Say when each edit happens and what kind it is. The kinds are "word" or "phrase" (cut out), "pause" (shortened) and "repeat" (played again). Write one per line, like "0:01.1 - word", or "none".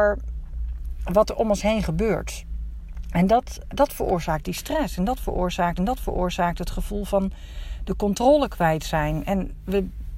0:03.7 - word
0:05.8 - repeat